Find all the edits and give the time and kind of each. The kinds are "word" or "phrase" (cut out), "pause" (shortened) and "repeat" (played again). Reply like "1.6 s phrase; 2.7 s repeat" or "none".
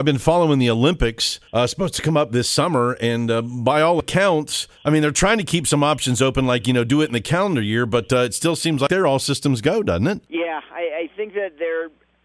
1.5 s pause; 4.8 s pause; 10.3 s pause